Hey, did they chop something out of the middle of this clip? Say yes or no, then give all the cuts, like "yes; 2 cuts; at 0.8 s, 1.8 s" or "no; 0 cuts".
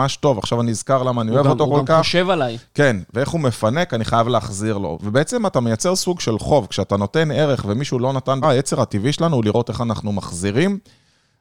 yes; 1 cut; at 8.4 s